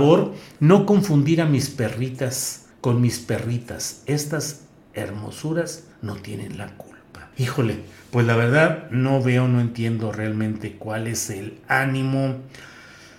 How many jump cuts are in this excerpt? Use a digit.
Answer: 3